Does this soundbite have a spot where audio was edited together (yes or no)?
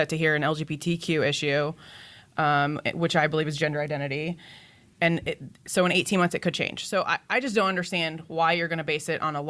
no